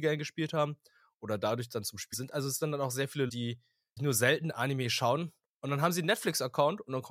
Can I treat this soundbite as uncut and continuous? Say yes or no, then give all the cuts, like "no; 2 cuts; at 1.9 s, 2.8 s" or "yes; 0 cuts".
no; 3 cuts; at 2.1 s, 3.3 s, 4.0 s